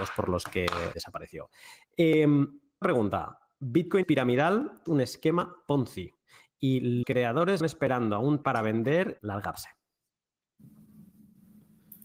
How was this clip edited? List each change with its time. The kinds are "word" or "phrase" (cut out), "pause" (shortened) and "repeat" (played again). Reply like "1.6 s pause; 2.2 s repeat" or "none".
0.9 s word; 2.8 s word; 4.0 s word; 4.9 s word; 7.0 s word; 7.6 s word; 8.4 s word; 9.2 s word